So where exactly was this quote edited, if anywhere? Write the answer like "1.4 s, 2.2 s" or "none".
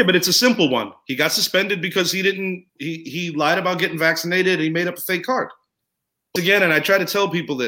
2.7 s, 6.4 s